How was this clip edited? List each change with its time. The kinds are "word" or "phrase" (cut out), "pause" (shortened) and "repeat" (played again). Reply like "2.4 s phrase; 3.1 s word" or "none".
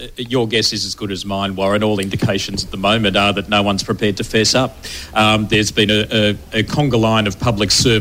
none